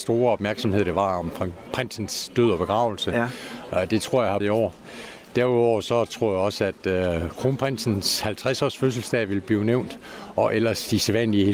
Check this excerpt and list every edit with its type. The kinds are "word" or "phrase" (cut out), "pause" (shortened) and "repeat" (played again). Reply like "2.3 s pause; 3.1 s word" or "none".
4.4 s phrase